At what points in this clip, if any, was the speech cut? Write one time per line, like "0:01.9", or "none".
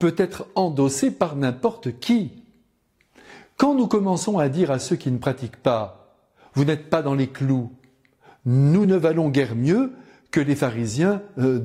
none